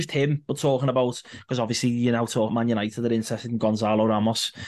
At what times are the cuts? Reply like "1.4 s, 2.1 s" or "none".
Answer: 2.5 s

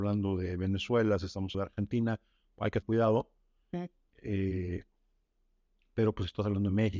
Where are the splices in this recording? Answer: 1.5 s, 2.8 s

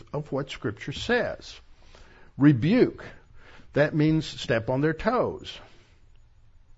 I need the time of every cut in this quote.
none

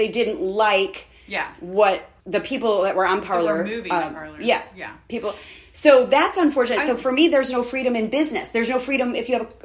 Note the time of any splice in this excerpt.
2.2 s

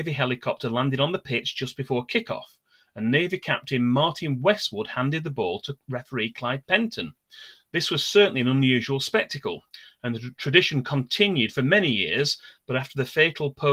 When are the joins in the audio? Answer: none

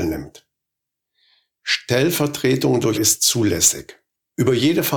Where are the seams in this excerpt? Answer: 2.9 s

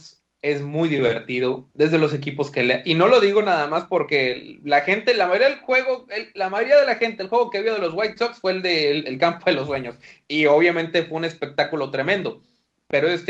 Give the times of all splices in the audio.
none

